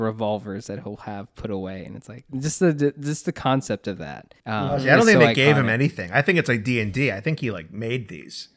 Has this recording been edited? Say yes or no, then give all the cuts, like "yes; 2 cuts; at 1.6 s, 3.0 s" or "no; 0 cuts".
yes; 2 cuts; at 2.3 s, 4.4 s